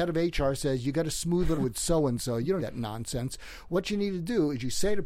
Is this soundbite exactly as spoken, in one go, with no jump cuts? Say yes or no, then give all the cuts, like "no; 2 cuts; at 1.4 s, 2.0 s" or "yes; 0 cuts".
no; 2 cuts; at 1.6 s, 2.6 s